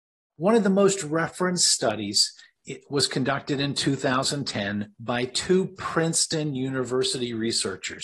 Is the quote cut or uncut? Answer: cut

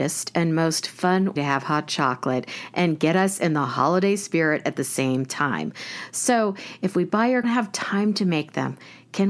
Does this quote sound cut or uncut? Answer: cut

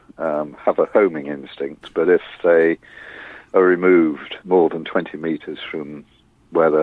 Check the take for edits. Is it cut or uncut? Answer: cut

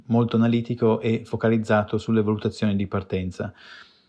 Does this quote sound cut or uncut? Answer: uncut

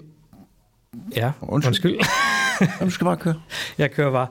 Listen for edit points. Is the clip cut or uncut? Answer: cut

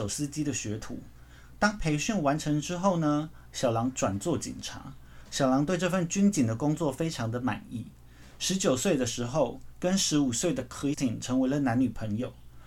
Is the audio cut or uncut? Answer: cut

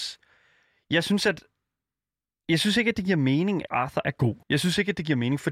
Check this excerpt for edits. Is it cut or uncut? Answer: cut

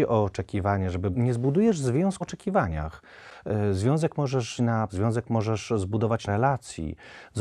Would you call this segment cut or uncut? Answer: cut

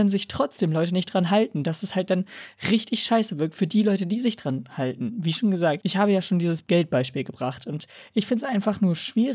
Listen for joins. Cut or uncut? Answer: uncut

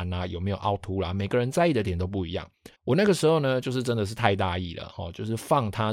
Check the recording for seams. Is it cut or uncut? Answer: cut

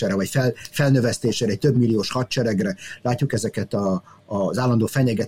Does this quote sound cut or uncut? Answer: uncut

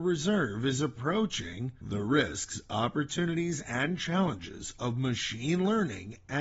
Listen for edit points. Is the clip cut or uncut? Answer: uncut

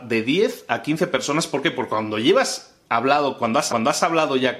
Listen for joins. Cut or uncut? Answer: cut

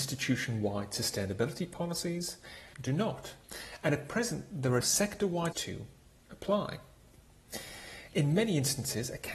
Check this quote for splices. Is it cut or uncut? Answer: cut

